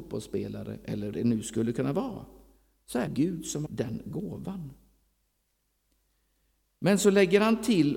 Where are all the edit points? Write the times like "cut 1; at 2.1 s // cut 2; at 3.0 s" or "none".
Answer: cut 1; at 1.1 s // cut 2; at 3.1 s // cut 3; at 3.7 s